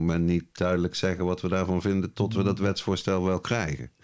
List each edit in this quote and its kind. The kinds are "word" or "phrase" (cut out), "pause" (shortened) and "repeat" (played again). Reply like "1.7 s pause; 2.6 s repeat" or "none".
none